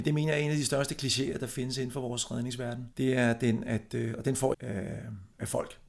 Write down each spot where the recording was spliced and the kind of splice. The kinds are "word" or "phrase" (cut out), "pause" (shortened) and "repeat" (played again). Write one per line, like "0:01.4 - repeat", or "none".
0:02.9 - pause
0:04.5 - phrase